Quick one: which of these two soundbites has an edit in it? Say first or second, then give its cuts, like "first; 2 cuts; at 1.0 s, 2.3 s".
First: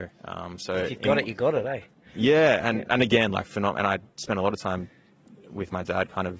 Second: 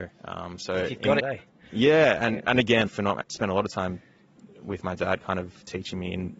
second; 3 cuts; at 1.2 s, 2.9 s, 3.2 s